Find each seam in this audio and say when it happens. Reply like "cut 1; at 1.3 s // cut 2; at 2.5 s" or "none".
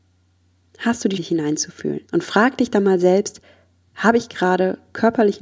cut 1; at 1.2 s // cut 2; at 2.1 s